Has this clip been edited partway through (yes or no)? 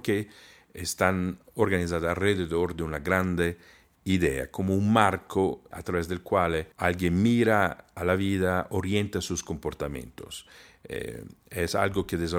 yes